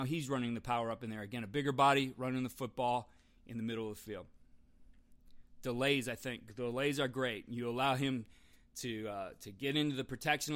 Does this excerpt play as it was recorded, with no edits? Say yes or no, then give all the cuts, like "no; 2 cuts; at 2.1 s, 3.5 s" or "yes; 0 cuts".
yes; 0 cuts